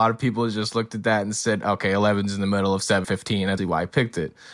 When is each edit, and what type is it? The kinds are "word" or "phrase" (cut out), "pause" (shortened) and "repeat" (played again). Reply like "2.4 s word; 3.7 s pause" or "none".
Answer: 3.0 s word; 3.6 s word